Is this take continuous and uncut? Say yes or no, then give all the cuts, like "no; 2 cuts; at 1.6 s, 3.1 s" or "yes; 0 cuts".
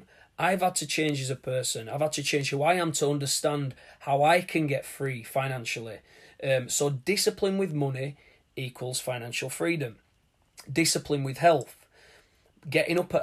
yes; 0 cuts